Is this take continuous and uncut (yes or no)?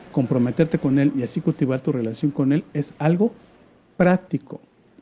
yes